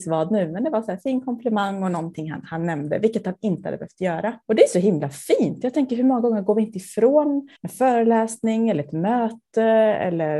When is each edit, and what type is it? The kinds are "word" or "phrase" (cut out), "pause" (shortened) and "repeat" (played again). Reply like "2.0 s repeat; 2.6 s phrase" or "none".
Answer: 4.4 s pause; 7.6 s pause